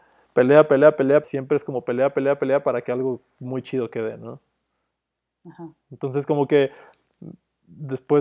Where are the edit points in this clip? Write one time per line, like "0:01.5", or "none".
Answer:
0:01.2
0:05.8